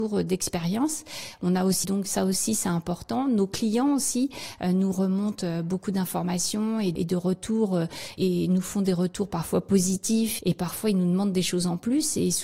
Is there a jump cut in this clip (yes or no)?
yes